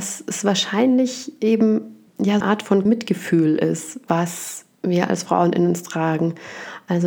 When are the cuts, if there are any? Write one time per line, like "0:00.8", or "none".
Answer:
0:02.1
0:02.4
0:02.9